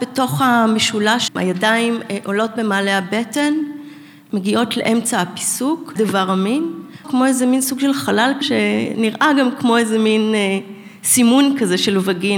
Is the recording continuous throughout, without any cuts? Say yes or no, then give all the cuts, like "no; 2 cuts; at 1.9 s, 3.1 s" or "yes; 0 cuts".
no; 4 cuts; at 1.3 s, 6.0 s, 7.0 s, 8.4 s